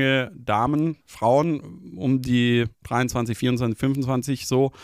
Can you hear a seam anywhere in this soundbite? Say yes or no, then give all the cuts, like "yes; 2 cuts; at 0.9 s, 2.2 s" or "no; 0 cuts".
yes; 2 cuts; at 1.0 s, 2.7 s